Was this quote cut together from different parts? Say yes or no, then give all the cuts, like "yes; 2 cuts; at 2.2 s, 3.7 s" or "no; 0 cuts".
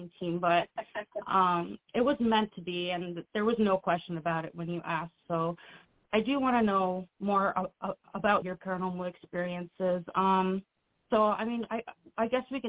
yes; 4 cuts; at 6.1 s, 7.1 s, 8.4 s, 10.8 s